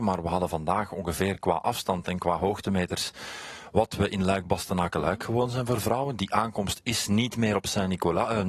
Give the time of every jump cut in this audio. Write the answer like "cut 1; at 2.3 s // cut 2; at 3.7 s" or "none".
none